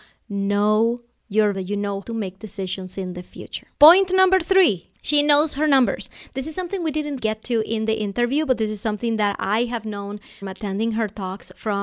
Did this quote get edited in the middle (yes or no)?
yes